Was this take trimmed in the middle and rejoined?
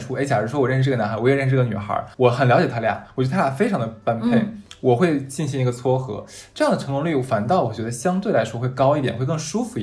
yes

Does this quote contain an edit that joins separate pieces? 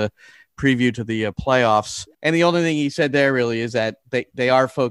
yes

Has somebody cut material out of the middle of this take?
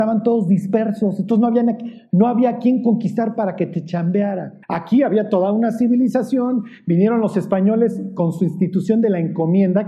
yes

